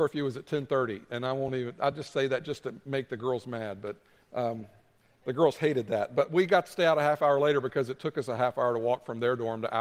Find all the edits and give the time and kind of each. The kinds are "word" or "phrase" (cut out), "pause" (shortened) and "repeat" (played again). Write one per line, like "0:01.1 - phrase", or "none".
none